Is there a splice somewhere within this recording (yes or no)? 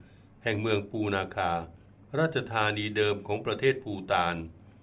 yes